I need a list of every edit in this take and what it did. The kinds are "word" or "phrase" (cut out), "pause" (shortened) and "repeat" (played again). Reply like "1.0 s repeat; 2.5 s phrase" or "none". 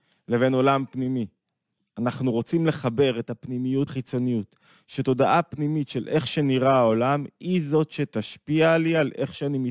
3.9 s word